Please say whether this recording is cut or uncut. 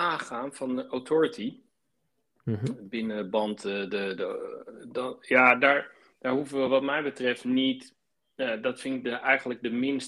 uncut